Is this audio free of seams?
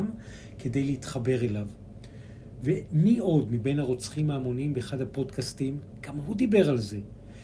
yes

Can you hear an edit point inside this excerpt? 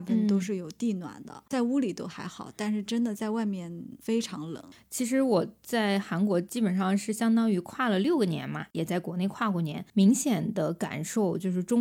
no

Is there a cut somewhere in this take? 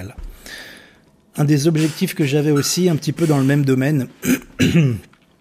no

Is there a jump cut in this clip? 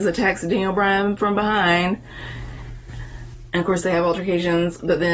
no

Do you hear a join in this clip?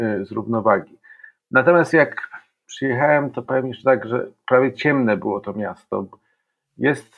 no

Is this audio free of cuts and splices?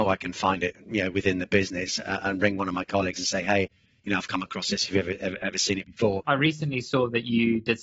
yes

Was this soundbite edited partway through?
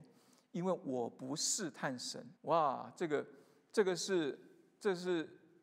yes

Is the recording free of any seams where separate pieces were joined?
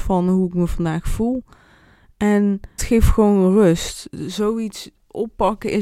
no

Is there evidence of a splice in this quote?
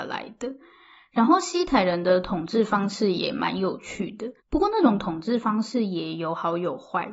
yes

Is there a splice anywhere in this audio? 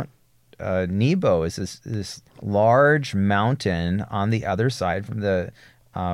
yes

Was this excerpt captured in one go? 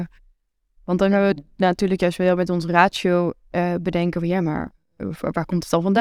yes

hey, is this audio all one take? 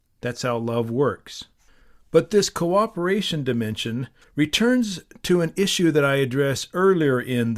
yes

